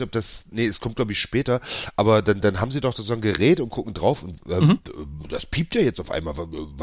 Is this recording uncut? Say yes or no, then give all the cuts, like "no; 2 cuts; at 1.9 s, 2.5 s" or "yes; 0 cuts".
yes; 0 cuts